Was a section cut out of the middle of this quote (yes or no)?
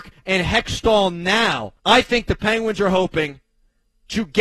yes